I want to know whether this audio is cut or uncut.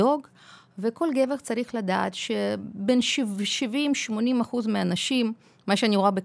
uncut